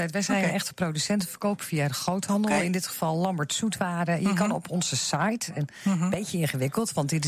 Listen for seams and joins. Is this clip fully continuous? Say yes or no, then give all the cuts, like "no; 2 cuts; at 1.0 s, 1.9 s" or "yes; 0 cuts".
yes; 0 cuts